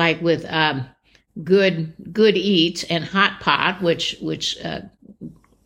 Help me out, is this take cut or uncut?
uncut